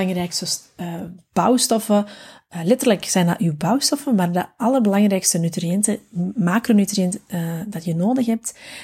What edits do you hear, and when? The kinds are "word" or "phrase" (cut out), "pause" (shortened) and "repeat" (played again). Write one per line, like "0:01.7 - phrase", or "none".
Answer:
none